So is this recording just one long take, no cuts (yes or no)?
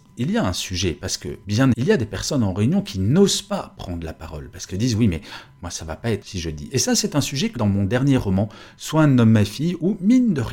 no